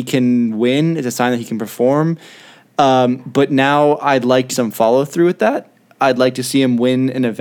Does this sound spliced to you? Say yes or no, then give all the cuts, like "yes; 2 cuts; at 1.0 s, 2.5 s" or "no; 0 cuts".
yes; 1 cut; at 4.5 s